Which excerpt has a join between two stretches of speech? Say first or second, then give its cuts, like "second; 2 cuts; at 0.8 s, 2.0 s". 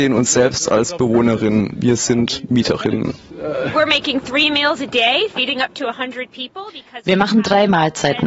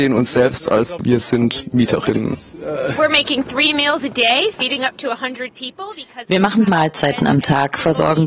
second; 2 cuts; at 1.0 s, 6.7 s